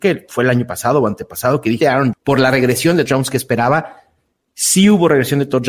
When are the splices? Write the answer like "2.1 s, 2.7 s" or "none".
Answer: 1.8 s, 2.1 s, 3.1 s